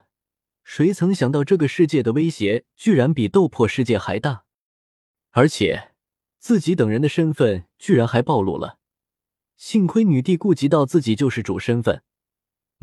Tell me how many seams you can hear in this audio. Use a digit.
0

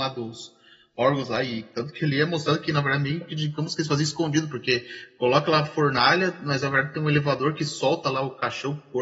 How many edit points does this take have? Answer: 0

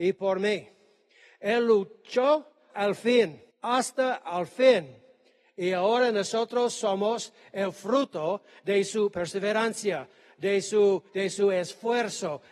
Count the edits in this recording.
3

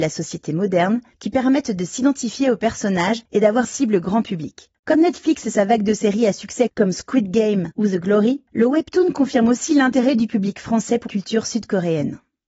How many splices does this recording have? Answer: 2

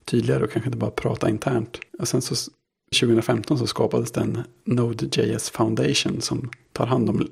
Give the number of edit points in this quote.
2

